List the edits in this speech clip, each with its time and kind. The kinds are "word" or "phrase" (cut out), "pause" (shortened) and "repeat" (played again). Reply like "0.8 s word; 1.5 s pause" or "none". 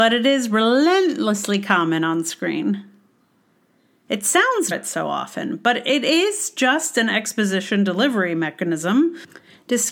4.7 s phrase